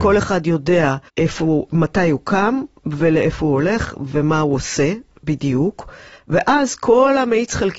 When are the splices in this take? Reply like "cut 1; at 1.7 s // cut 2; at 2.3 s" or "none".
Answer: cut 1; at 1.1 s